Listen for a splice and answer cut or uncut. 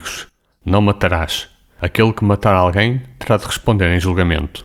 uncut